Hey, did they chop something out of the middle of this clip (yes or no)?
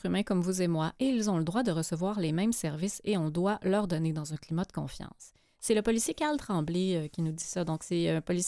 no